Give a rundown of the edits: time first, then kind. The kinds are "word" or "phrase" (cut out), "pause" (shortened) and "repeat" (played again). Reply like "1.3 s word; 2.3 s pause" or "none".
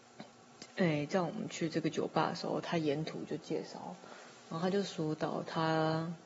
none